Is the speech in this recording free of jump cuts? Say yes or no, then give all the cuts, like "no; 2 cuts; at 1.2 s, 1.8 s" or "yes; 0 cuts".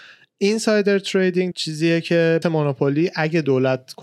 no; 2 cuts; at 1.5 s, 2.4 s